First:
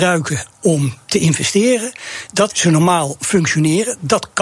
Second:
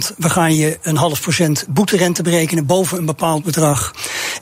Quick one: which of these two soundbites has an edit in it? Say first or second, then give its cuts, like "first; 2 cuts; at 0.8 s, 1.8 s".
first; 1 cut; at 2.5 s